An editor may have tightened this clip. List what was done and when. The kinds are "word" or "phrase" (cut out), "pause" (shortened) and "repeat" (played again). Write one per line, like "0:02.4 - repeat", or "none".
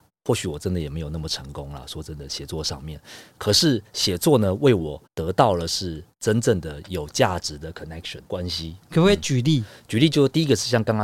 0:05.1 - pause
0:08.2 - pause